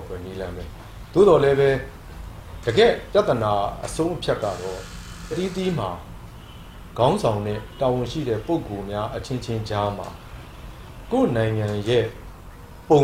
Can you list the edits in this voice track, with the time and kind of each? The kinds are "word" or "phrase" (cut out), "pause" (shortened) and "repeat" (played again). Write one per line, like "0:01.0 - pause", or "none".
0:05.3 - word